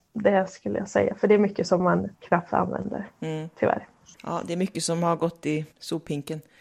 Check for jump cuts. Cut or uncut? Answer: cut